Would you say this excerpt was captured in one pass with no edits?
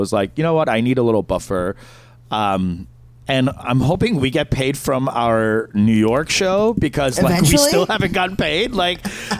yes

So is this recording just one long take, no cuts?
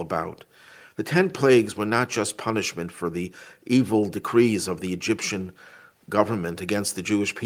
yes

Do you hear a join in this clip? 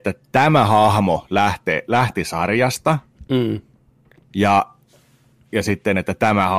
no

